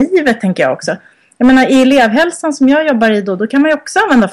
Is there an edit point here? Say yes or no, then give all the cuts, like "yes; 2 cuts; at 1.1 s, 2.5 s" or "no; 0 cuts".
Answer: no; 0 cuts